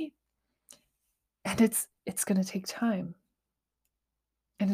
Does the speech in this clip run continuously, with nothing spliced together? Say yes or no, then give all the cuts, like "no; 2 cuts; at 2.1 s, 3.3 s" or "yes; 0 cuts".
no; 1 cut; at 2.0 s